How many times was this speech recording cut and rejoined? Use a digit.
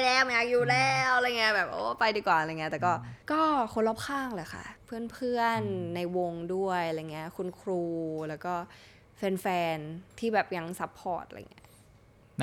3